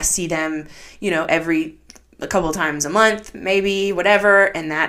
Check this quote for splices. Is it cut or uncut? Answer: uncut